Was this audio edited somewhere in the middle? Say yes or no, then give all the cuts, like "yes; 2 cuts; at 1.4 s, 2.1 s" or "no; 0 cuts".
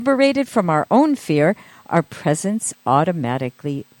no; 0 cuts